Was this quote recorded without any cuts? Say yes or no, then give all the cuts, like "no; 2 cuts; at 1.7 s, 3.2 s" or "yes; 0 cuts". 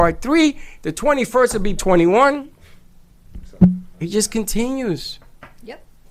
no; 2 cuts; at 1.8 s, 3.9 s